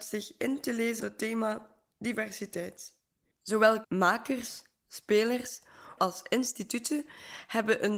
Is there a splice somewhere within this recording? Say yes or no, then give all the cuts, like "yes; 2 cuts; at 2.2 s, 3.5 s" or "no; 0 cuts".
yes; 3 cuts; at 1.0 s, 3.8 s, 6.0 s